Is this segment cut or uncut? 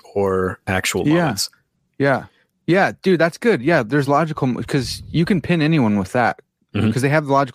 uncut